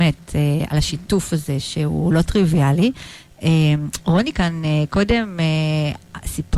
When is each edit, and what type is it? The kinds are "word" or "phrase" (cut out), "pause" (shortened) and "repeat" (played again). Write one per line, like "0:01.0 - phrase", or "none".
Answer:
none